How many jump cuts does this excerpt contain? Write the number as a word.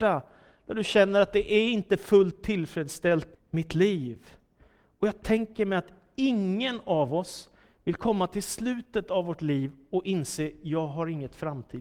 one